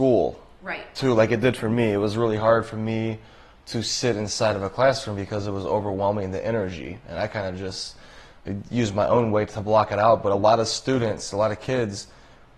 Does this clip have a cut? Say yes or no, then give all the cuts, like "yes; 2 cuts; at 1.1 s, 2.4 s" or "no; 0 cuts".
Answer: no; 0 cuts